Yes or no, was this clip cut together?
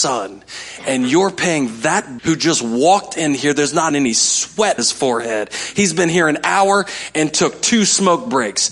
yes